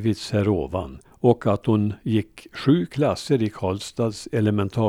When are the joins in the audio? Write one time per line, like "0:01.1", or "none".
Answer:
0:01.1

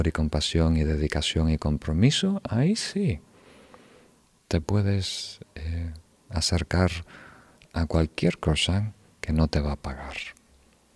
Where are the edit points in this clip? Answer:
none

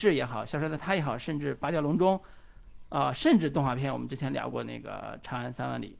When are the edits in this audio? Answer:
none

